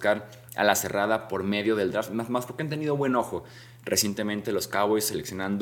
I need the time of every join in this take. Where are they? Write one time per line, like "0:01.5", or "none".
none